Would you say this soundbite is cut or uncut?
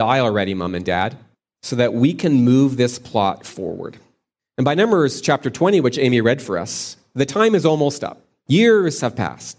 uncut